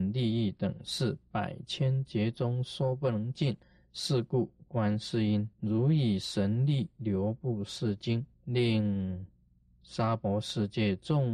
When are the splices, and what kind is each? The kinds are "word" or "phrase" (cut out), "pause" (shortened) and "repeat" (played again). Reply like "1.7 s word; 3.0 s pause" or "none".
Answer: 3.6 s pause; 5.5 s pause; 8.3 s pause

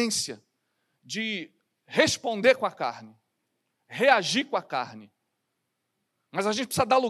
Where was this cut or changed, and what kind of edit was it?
none

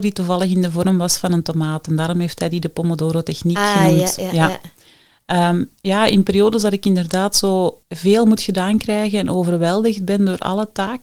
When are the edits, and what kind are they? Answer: 7.8 s pause

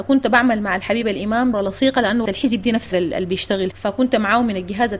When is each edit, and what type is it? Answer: 1.5 s word; 2.3 s word; 2.9 s word; 3.7 s word

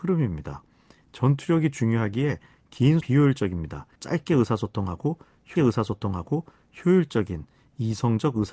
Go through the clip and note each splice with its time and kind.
3.0 s word; 4.0 s pause; 5.6 s repeat

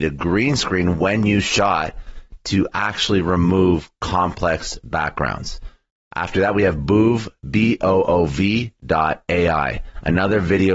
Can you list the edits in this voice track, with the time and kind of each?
none

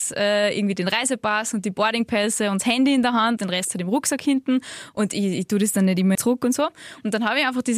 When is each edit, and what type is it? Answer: 3.4 s word; 6.1 s phrase

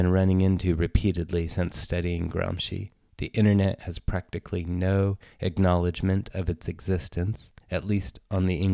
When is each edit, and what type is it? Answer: 7.6 s pause

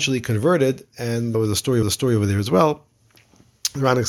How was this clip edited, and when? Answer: 1.3 s word; 1.8 s repeat

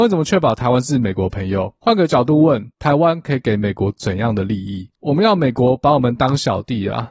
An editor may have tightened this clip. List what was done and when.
2.7 s pause

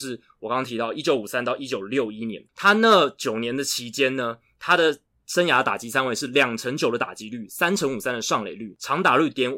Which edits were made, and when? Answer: none

